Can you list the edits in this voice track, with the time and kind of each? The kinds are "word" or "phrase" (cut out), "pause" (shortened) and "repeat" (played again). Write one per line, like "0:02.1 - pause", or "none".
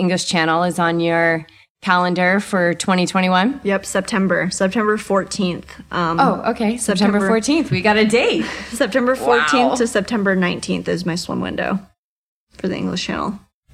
none